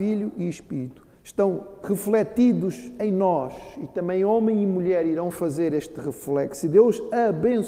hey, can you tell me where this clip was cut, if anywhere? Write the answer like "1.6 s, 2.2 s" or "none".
1.2 s